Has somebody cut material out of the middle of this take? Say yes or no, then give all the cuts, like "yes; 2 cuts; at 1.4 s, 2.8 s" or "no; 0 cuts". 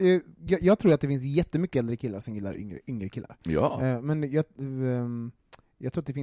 no; 0 cuts